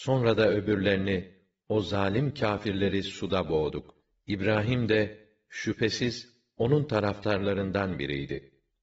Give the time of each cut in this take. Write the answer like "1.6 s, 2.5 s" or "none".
none